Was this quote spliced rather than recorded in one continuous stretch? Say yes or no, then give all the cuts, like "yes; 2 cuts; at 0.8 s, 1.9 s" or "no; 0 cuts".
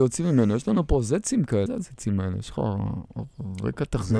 yes; 1 cut; at 1.7 s